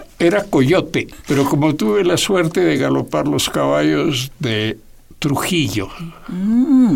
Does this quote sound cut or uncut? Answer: uncut